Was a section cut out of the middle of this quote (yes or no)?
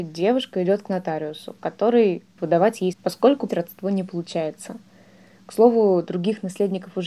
yes